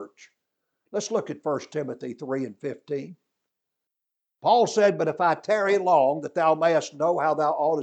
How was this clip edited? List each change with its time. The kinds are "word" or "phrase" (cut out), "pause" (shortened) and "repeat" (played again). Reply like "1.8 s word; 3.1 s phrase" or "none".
none